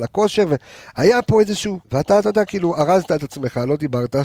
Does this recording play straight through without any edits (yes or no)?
no